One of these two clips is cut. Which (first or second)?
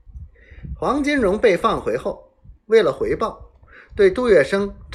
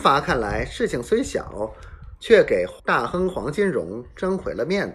second